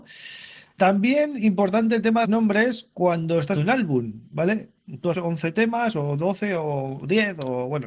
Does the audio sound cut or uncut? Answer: cut